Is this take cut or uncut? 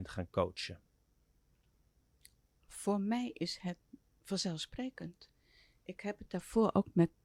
uncut